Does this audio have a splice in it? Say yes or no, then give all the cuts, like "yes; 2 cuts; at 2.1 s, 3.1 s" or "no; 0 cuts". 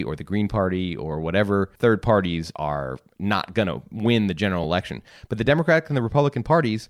no; 0 cuts